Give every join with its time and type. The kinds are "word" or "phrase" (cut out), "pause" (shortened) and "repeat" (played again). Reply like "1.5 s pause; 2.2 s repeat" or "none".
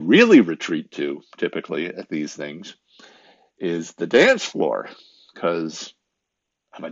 none